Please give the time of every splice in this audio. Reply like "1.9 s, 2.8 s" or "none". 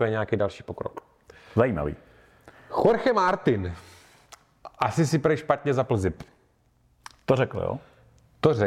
none